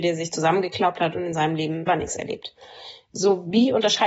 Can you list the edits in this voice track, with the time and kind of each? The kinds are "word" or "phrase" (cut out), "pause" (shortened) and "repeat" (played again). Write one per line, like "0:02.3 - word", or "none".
0:01.9 - word